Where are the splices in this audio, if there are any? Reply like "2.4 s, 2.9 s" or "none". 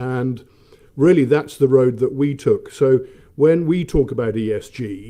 none